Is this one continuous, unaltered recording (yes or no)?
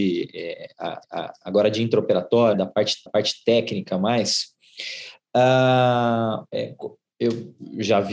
no